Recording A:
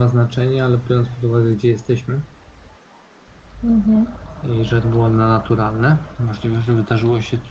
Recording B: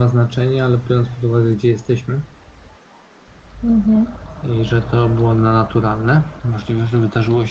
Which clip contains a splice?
A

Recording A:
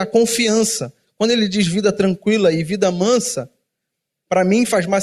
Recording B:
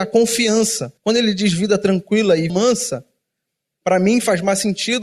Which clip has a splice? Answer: B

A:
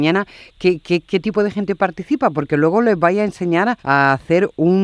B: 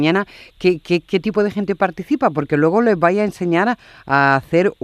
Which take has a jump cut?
A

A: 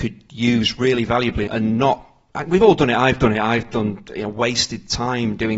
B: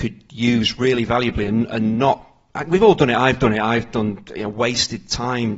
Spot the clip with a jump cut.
A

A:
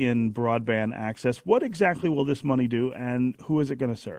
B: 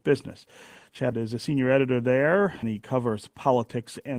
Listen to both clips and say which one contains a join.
B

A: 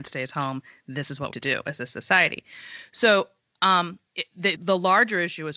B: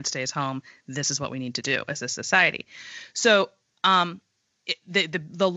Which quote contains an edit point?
A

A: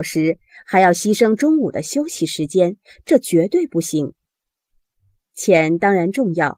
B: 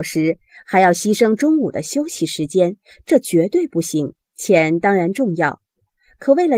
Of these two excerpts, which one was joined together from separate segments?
B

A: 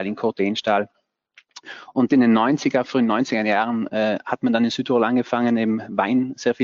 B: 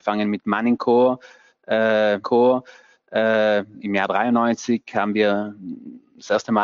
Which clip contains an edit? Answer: B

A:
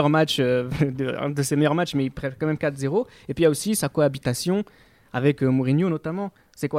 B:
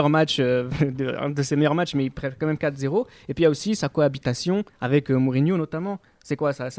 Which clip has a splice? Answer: B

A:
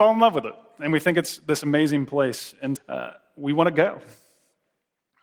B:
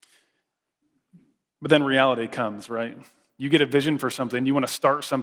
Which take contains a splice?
A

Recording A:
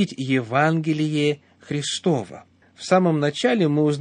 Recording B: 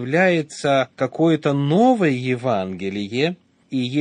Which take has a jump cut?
B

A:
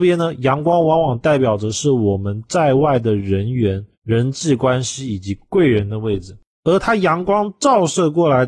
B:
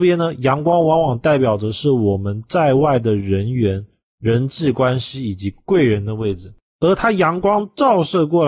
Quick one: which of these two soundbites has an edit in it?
A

